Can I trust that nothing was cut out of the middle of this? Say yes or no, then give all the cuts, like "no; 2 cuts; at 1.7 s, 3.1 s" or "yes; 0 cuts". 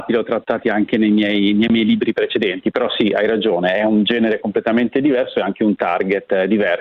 yes; 0 cuts